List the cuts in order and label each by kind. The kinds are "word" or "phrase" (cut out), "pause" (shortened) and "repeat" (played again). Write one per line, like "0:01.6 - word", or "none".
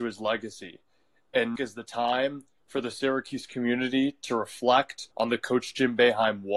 0:01.6 - phrase
0:05.1 - pause